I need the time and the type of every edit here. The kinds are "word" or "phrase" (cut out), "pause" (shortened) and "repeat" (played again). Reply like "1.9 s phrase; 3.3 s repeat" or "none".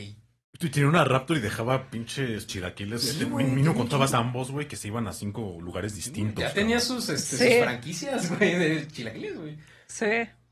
2.5 s phrase; 4.1 s word